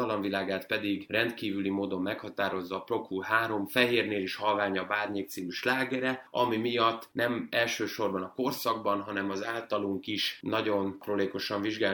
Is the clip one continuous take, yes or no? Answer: yes